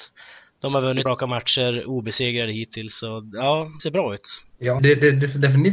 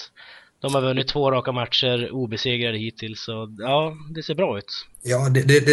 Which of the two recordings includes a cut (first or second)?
first